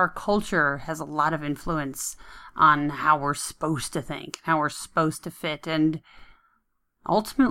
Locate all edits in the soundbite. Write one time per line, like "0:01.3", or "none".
none